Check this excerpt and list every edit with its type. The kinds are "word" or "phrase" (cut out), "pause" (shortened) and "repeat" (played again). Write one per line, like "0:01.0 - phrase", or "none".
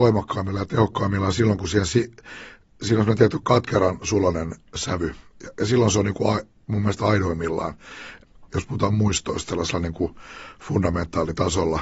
none